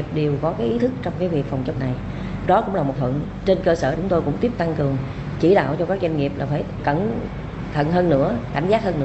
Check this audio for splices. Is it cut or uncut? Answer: cut